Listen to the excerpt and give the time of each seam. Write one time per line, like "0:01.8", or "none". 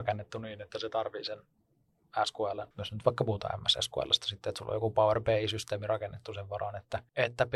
0:02.7